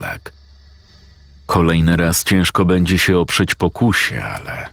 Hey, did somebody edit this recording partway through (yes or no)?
no